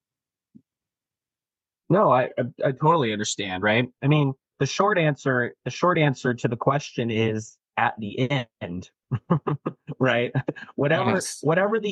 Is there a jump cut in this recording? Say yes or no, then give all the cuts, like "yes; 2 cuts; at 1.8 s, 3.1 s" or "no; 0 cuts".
no; 0 cuts